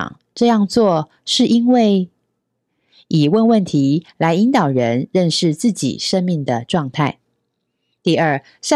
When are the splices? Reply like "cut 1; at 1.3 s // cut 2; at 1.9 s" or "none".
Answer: none